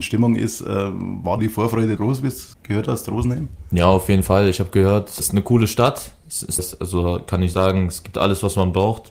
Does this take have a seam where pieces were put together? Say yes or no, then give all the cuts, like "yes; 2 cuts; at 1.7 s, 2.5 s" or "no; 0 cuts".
yes; 6 cuts; at 1.4 s, 2.0 s, 2.5 s, 5.2 s, 6.6 s, 7.5 s